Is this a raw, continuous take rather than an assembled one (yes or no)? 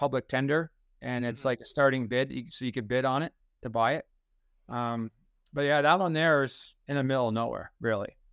yes